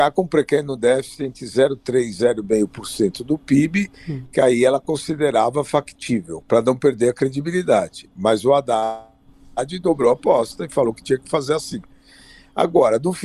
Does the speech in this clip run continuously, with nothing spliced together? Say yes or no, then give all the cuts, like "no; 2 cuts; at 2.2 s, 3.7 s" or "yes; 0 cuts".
yes; 0 cuts